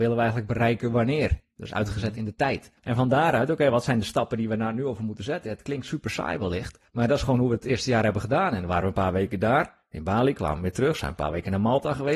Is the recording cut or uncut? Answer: cut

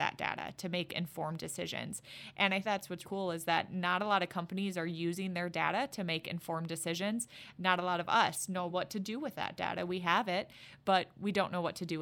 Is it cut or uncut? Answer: cut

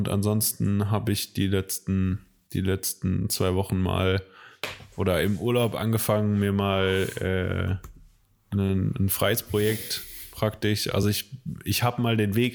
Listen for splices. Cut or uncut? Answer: uncut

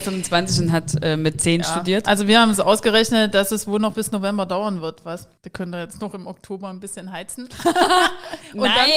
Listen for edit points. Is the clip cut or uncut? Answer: cut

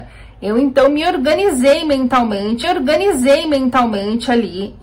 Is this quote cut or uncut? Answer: cut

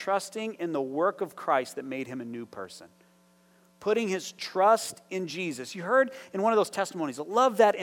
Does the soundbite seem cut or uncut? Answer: uncut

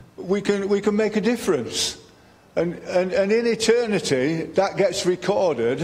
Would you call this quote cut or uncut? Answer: uncut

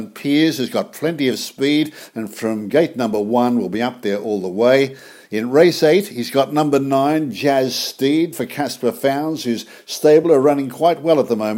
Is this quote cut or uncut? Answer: uncut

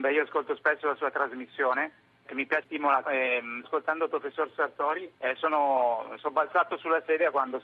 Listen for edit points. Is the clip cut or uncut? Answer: cut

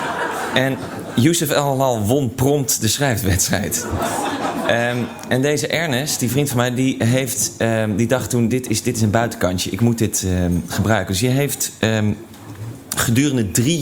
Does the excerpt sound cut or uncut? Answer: uncut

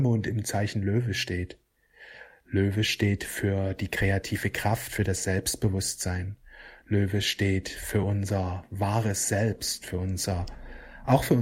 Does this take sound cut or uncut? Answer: uncut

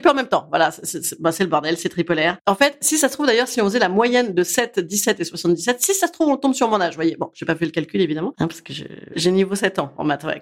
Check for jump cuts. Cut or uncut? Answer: uncut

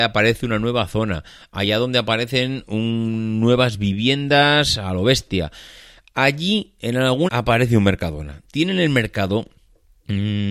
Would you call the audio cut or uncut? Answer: cut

